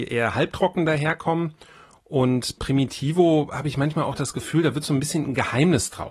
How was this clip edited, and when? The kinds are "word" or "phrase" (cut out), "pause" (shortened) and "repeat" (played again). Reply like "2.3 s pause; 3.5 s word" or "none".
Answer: 2.6 s word